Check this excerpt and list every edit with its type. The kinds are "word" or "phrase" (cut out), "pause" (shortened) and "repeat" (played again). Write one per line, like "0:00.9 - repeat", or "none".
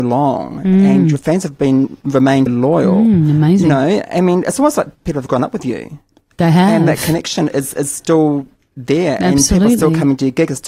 0:02.5 - word